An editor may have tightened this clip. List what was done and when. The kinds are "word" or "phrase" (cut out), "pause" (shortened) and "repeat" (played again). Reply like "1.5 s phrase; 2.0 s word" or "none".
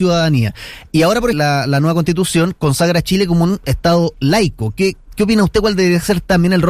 1.3 s phrase